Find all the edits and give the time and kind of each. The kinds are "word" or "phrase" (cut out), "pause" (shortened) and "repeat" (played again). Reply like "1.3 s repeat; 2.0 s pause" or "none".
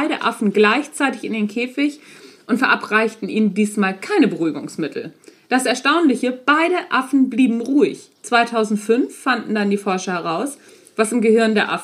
8.2 s pause

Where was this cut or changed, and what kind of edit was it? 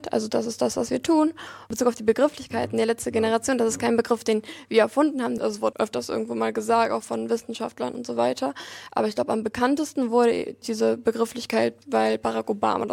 5.7 s word; 10.6 s word

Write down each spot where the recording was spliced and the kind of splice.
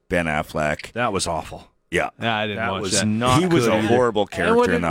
none

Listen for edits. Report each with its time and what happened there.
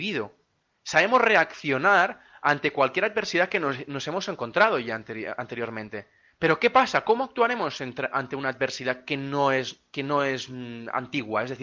none

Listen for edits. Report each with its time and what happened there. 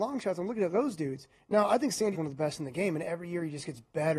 2.1 s word

